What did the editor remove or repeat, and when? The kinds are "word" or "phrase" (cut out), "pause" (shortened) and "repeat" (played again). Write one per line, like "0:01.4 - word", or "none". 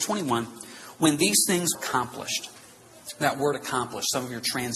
0:01.7 - word